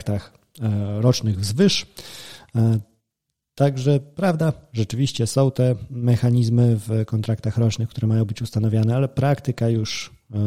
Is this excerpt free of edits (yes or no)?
yes